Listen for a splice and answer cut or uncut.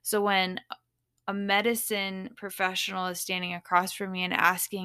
uncut